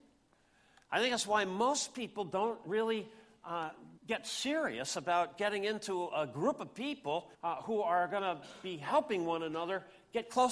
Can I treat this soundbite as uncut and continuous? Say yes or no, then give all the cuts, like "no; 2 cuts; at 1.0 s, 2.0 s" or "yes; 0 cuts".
no; 2 cuts; at 4.0 s, 7.3 s